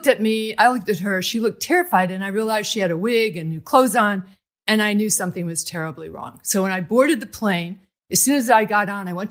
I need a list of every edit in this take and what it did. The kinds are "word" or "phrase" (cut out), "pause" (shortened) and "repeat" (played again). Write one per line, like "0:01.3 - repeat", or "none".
none